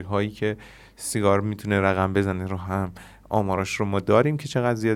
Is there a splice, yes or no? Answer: no